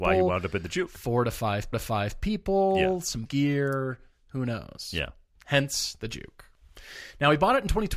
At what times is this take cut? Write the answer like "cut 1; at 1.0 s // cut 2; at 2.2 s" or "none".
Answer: cut 1; at 1.7 s // cut 2; at 3.3 s